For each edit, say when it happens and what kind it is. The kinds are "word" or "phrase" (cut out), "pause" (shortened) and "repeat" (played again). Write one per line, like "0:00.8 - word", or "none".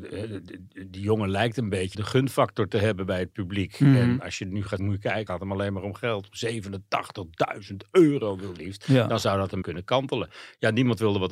0:01.9 - word
0:04.8 - word
0:05.3 - word
0:08.6 - word
0:09.6 - word